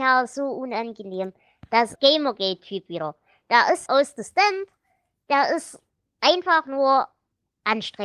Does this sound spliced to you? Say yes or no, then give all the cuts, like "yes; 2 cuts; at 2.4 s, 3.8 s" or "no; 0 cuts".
yes; 2 cuts; at 2.0 s, 3.9 s